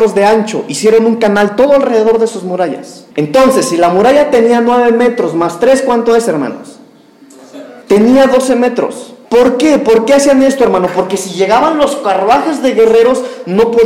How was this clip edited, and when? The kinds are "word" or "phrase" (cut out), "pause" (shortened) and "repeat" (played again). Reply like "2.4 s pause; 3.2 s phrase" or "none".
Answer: 3.1 s pause; 7.8 s pause; 9.2 s pause